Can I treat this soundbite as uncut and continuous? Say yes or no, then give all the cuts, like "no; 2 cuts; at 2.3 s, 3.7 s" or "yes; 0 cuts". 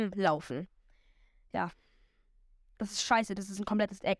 yes; 0 cuts